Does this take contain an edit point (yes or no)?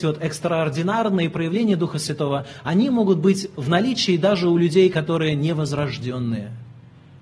no